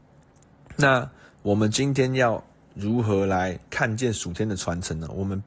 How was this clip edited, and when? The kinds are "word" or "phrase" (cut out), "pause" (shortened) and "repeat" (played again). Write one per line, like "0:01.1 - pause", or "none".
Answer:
0:03.7 - pause